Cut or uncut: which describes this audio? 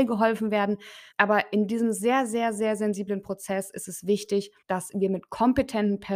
cut